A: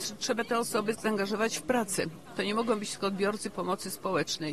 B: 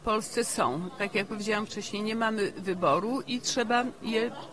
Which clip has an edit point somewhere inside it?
A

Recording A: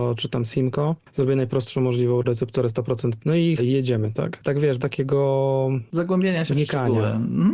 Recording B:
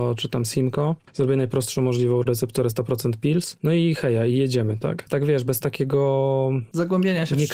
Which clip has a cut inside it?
A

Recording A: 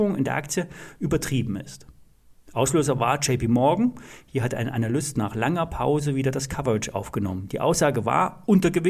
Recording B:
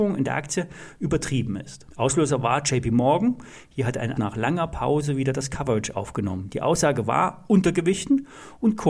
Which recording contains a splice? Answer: B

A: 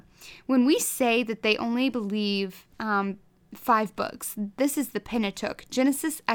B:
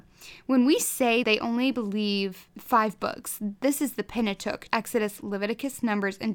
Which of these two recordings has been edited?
B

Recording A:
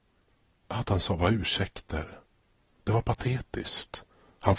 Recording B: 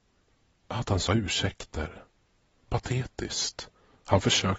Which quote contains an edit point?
B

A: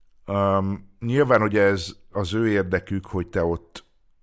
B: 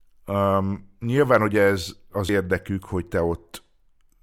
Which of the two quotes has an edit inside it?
B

